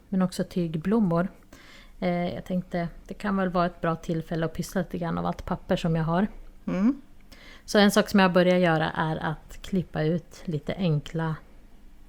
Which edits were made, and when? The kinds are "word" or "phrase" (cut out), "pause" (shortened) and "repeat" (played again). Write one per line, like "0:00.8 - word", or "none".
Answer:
none